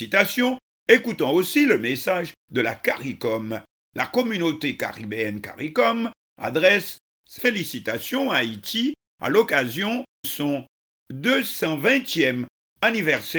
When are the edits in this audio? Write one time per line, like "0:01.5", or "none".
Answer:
0:07.4
0:10.2